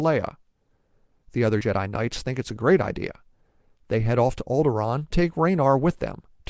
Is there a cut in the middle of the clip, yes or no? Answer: yes